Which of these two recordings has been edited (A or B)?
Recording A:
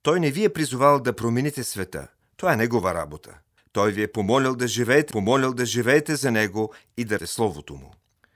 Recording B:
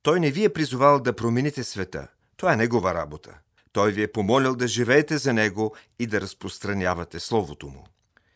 A